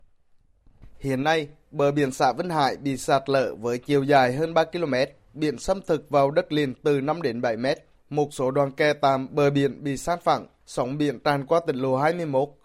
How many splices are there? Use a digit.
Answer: 0